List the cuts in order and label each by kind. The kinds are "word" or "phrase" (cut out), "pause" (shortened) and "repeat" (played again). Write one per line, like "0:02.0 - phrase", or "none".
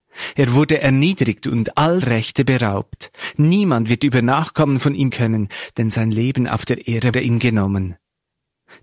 0:02.0 - word
0:05.1 - word
0:07.1 - word